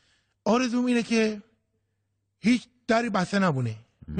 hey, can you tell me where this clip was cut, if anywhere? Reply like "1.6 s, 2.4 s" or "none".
none